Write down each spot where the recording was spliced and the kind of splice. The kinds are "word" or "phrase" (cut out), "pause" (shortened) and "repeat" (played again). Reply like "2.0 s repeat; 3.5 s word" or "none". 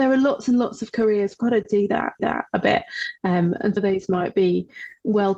1.4 s phrase; 2.2 s repeat; 3.8 s word